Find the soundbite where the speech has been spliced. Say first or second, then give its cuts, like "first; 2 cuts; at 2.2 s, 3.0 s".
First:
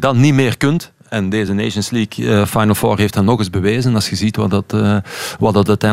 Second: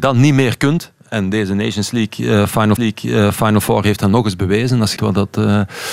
second; 2 cuts; at 2.8 s, 5.0 s